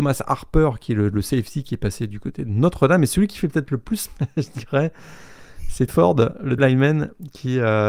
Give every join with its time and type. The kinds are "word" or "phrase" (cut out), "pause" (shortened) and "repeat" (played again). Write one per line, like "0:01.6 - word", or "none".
0:04.1 - word
0:05.9 - word
0:06.6 - word